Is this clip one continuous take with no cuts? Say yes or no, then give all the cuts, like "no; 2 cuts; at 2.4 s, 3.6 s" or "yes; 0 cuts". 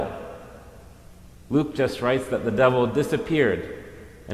yes; 0 cuts